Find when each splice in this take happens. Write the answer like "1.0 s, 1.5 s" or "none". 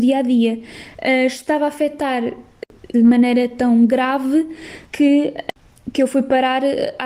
2.9 s, 4.9 s